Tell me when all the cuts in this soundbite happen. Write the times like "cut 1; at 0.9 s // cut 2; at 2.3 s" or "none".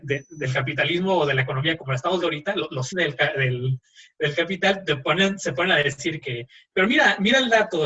cut 1; at 1.8 s // cut 2; at 2.2 s // cut 3; at 2.9 s // cut 4; at 6.2 s